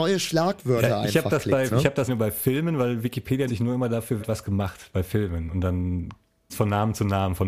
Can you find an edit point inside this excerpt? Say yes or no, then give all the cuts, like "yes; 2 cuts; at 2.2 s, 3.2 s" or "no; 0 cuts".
yes; 5 cuts; at 1.7 s, 2.1 s, 3.5 s, 4.2 s, 6.5 s